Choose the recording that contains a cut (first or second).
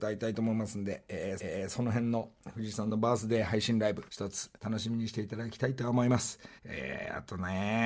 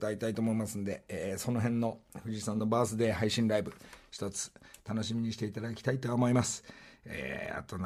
first